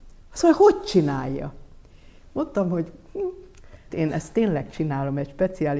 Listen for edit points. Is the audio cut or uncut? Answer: cut